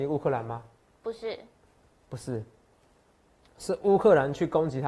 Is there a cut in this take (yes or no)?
no